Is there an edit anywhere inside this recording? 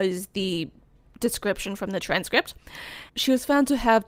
yes; 1 cut; at 3.1 s

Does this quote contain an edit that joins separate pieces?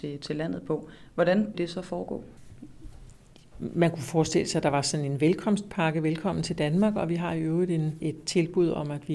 yes; 2 cuts; at 1.5 s, 8.0 s

